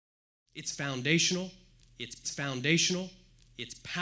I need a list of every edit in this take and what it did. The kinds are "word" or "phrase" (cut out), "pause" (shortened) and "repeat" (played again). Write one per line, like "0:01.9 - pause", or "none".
0:02.2 - repeat